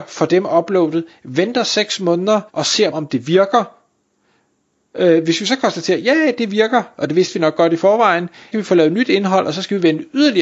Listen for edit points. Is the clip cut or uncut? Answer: cut